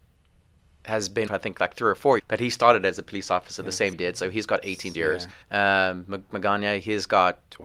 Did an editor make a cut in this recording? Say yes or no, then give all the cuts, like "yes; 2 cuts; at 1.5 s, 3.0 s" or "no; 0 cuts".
yes; 6 cuts; at 1.3 s, 2.2 s, 3.9 s, 4.9 s, 5.4 s, 6.3 s